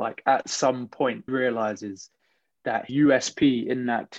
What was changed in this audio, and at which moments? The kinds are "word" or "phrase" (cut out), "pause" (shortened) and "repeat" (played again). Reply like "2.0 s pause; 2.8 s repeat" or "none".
1.3 s word; 2.9 s word